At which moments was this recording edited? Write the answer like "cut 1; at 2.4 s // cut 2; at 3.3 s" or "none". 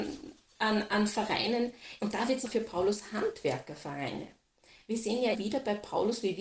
cut 1; at 2.0 s // cut 2; at 2.4 s // cut 3; at 5.3 s